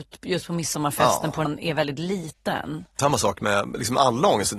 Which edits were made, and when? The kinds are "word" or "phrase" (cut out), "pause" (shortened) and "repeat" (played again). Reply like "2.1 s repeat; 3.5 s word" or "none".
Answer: 1.4 s word; 3.0 s phrase